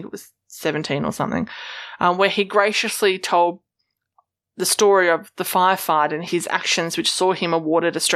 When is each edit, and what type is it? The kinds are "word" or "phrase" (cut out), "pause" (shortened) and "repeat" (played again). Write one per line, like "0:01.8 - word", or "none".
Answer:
none